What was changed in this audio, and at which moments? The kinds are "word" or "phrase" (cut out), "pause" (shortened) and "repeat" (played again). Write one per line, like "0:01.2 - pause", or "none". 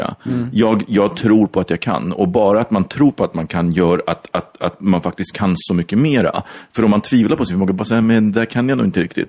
none